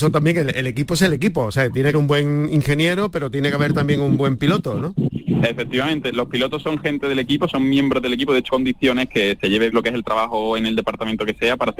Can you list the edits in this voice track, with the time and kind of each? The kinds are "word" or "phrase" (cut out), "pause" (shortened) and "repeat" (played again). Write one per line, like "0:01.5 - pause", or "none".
0:01.9 - phrase
0:08.5 - word
0:09.7 - word